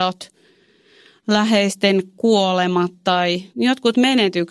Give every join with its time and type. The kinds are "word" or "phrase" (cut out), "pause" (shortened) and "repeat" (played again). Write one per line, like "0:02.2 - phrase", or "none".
0:03.5 - pause